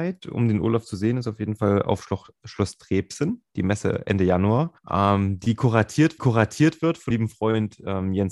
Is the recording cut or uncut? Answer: cut